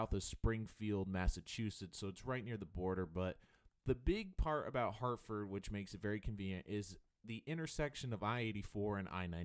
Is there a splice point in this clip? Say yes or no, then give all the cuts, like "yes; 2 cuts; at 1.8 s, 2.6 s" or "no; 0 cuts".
no; 0 cuts